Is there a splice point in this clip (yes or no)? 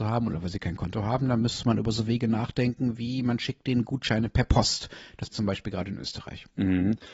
yes